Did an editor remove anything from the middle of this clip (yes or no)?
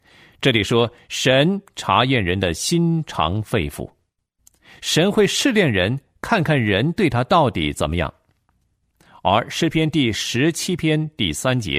no